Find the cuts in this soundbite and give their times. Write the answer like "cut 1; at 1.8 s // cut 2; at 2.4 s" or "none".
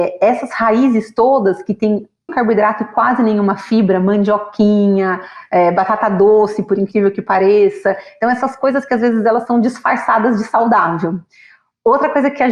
cut 1; at 2.3 s